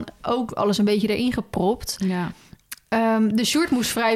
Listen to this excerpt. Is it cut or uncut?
uncut